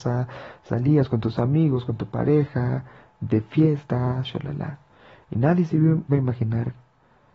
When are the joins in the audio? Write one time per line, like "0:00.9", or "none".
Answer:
0:04.2
0:06.1